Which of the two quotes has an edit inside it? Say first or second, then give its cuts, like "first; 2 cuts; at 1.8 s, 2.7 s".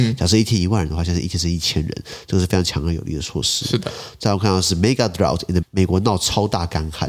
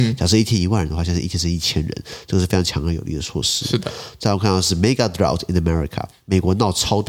first; 1 cut; at 5.6 s